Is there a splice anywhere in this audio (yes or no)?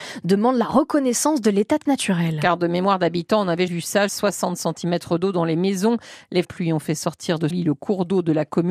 yes